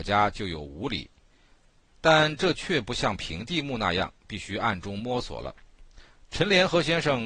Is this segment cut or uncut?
uncut